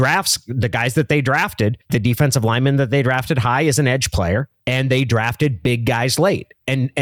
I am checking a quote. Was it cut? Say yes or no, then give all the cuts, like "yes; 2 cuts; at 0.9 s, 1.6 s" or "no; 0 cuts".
yes; 1 cut; at 1.8 s